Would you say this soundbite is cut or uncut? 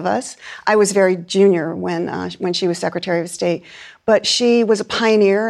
uncut